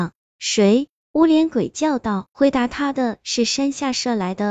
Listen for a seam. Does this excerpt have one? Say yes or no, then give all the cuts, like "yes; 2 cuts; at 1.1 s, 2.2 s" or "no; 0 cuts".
yes; 1 cut; at 2.3 s